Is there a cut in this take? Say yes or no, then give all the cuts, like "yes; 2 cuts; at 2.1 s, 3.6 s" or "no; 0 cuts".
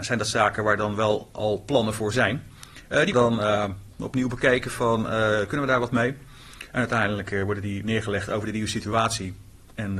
yes; 2 cuts; at 3.1 s, 3.9 s